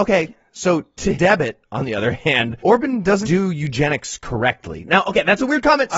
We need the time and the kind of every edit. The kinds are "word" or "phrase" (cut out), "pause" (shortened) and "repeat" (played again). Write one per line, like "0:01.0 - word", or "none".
0:01.1 - word
0:02.6 - pause
0:03.2 - word